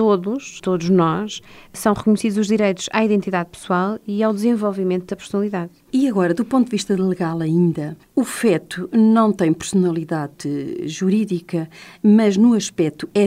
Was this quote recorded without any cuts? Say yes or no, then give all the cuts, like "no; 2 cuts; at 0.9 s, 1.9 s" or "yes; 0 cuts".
yes; 0 cuts